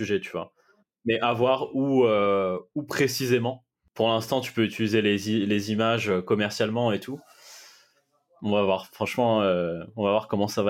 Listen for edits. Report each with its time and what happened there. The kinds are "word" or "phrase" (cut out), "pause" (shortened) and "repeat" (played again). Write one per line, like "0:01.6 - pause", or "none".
none